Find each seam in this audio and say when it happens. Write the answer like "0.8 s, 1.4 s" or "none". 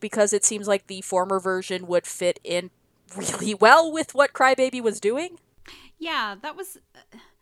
none